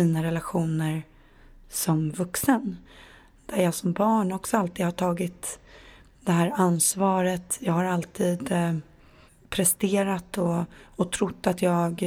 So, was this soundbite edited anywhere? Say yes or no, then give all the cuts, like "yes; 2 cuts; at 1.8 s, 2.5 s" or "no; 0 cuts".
no; 0 cuts